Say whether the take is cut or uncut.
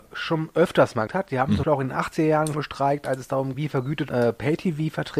cut